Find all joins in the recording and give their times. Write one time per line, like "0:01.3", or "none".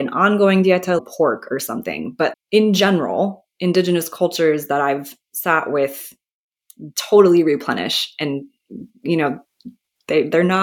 0:01.0
0:02.3
0:05.2